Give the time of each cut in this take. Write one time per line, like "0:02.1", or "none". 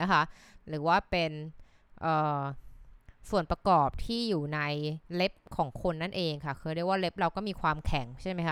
0:05.0